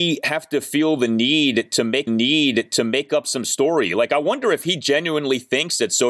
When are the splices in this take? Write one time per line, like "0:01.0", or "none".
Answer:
0:02.1